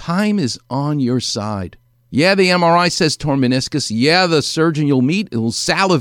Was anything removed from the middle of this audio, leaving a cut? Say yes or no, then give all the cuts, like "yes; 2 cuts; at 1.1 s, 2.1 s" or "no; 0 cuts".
no; 0 cuts